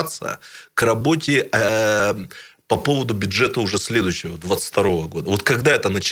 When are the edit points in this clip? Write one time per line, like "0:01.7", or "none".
none